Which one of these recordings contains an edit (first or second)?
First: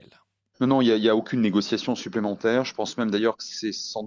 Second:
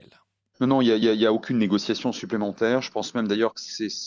second